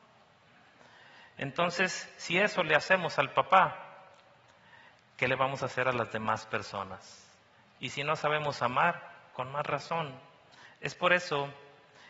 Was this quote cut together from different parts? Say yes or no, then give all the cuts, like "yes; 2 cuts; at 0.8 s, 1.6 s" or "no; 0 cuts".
no; 0 cuts